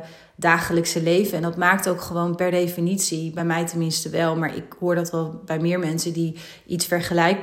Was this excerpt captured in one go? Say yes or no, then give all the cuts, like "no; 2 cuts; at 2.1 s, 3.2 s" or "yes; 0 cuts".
yes; 0 cuts